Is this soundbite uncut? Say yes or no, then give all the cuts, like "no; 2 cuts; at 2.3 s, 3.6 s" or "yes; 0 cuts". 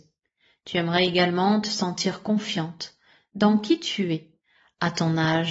yes; 0 cuts